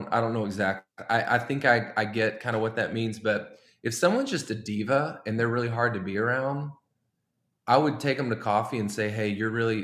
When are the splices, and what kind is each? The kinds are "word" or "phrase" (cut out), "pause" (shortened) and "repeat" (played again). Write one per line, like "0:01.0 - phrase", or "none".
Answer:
none